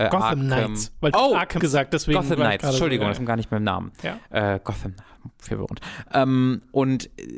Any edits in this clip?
yes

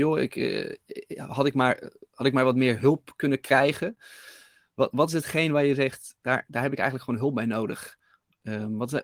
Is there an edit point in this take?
no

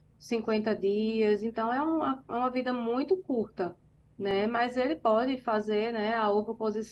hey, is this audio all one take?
yes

